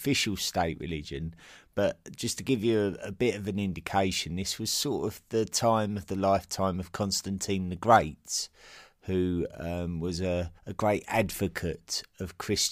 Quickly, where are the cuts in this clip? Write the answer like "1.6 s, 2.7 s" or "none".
10.6 s